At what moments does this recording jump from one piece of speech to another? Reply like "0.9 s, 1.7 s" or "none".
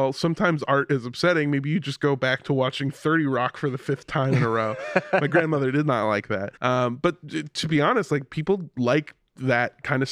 6.6 s